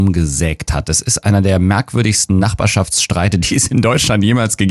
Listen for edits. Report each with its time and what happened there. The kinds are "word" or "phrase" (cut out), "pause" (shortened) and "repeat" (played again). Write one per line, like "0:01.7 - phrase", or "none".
none

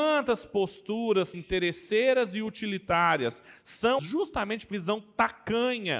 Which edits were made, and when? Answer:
0:01.3 - word
0:04.0 - word
0:04.7 - word

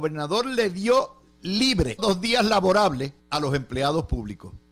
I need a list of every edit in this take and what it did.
0:02.0 - phrase
0:03.2 - pause

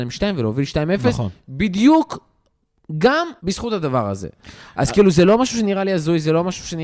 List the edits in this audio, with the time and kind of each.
0:03.4 - pause

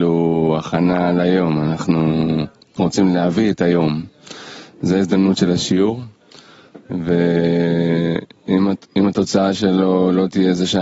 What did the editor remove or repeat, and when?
none

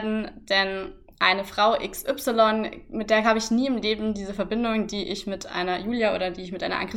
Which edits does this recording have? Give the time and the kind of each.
none

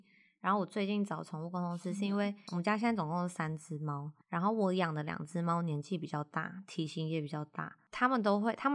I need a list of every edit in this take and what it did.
0:04.2 - pause

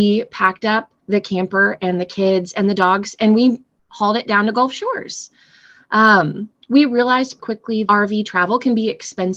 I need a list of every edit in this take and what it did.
0:01.0 - pause
0:07.4 - word
0:07.9 - word

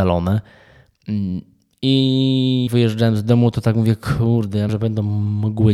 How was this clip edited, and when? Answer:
0:02.7 - word
0:04.7 - word

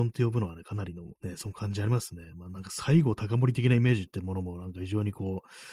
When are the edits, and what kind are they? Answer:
0:01.2 - pause

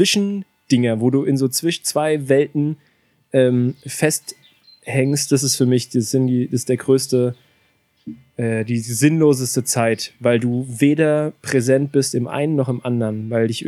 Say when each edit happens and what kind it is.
none

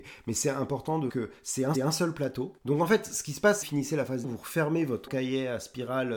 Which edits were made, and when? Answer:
0:01.1 - word
0:01.7 - repeat
0:02.6 - pause
0:03.6 - phrase
0:04.2 - word
0:05.1 - word

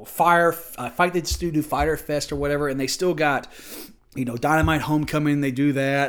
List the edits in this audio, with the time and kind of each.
0:04.0 - pause

